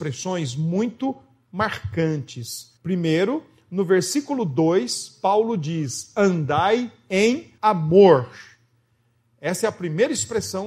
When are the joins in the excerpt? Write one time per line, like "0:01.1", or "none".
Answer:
0:02.8
0:07.6